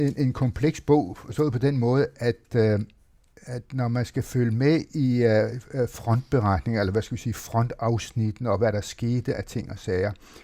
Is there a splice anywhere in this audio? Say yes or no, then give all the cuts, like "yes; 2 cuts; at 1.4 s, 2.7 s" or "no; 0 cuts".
no; 0 cuts